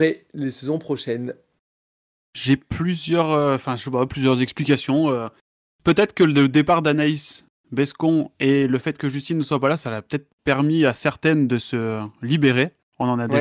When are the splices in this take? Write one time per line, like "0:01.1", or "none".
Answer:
none